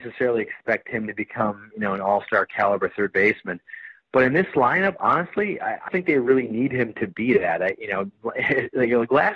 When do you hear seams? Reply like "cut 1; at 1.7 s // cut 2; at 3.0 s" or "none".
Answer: cut 1; at 5.9 s